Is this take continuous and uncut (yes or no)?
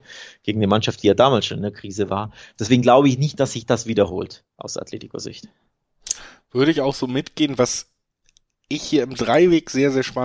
yes